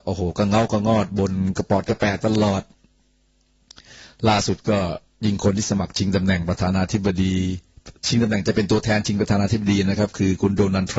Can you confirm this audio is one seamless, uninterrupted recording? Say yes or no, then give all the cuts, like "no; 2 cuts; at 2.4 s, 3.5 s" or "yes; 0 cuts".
no; 1 cut; at 8.0 s